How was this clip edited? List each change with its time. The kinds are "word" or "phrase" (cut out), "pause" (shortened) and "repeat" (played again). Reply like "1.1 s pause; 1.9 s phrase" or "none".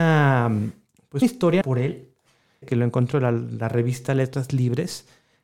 1.2 s word; 1.6 s word; 2.6 s word; 3.1 s word